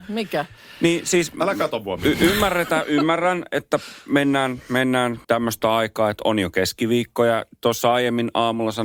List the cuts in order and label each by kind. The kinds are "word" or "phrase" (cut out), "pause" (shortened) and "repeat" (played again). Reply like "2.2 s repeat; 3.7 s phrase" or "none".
5.2 s pause